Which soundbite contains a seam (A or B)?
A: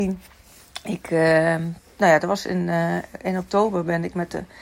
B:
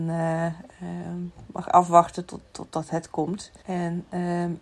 B